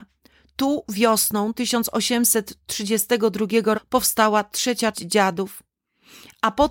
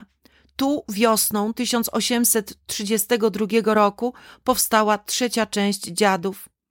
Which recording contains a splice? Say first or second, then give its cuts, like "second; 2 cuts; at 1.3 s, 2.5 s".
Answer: first; 2 cuts; at 3.7 s, 4.9 s